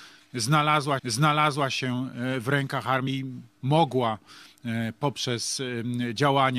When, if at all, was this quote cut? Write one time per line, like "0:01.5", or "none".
0:01.0
0:03.1